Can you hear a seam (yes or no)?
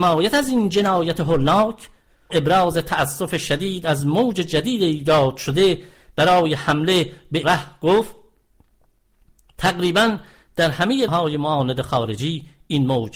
yes